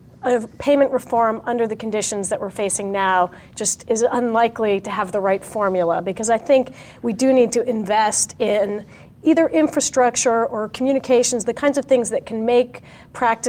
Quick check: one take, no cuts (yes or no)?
yes